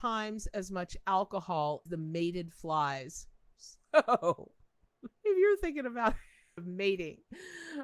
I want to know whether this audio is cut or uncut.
cut